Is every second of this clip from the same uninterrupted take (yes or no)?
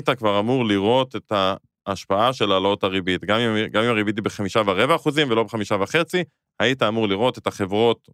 yes